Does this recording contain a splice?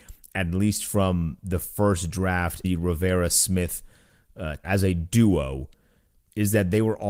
yes; 2 cuts; at 2.6 s, 4.6 s

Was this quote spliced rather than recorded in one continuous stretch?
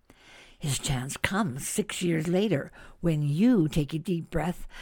no; 0 cuts

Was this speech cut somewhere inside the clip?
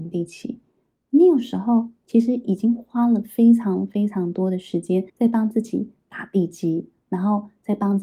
yes; 1 cut; at 5.1 s

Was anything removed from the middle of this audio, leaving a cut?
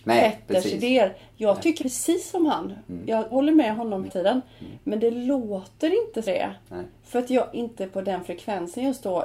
yes; 5 cuts; at 1.8 s, 3.3 s, 4.1 s, 6.2 s, 7.5 s

